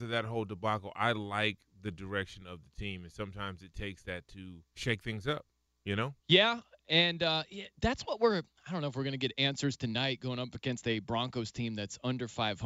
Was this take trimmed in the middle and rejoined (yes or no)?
yes